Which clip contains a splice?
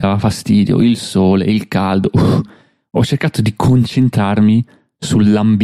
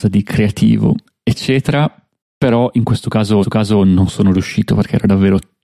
second; 1 cut; at 3.4 s

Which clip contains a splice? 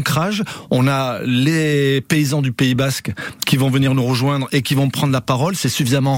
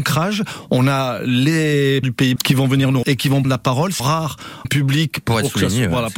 second; 6 cuts; at 2.0 s, 2.4 s, 3.0 s, 3.4 s, 4.0 s, 4.6 s

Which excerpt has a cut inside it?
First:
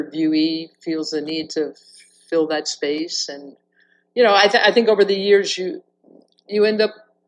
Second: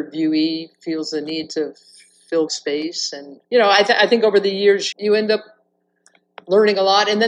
second; 3 cuts; at 2.5 s, 3.4 s, 4.9 s

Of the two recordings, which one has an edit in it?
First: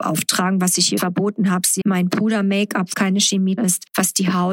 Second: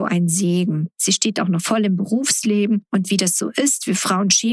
first; 4 cuts; at 1.0 s, 1.8 s, 2.9 s, 3.6 s

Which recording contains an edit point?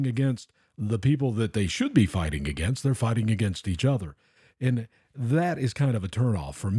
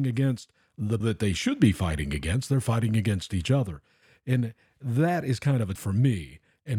second; 2 cuts; at 1.0 s, 5.8 s

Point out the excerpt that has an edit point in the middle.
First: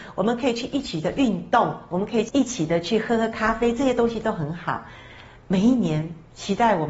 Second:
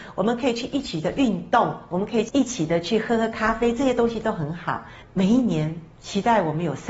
second; 1 cut; at 5.0 s

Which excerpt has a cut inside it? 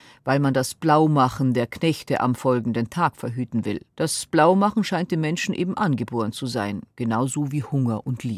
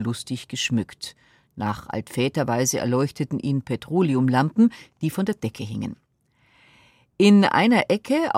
first; 1 cut; at 3.9 s

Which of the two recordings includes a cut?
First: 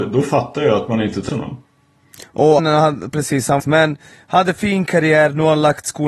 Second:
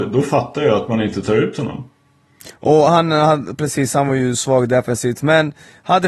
first; 3 cuts; at 1.3 s, 2.6 s, 3.6 s

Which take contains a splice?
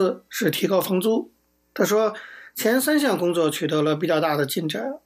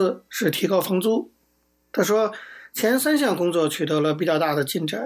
first; 1 cut; at 1.4 s

